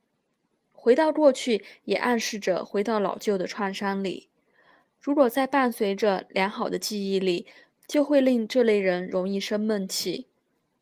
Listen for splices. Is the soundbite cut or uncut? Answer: uncut